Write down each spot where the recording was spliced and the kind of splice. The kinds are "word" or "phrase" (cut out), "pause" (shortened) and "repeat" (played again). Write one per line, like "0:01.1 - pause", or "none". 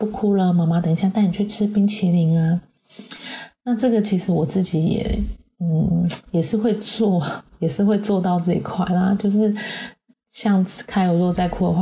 none